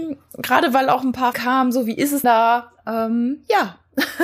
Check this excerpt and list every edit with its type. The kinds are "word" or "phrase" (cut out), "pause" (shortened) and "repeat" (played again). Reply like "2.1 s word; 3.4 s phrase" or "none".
1.3 s word; 2.2 s word